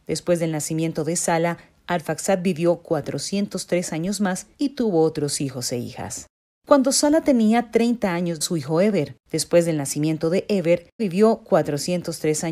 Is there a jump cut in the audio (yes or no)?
yes